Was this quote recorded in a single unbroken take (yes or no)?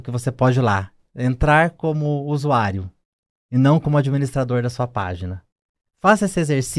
yes